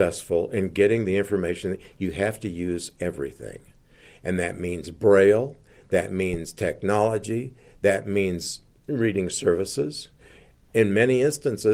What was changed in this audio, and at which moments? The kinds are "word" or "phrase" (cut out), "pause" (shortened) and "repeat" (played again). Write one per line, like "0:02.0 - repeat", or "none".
none